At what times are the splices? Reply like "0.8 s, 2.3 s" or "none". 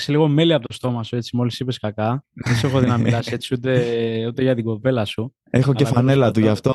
none